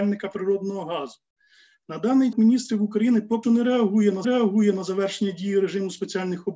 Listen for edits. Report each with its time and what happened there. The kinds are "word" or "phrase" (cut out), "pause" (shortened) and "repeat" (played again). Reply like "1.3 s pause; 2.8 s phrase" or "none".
2.3 s phrase; 3.4 s word; 4.2 s repeat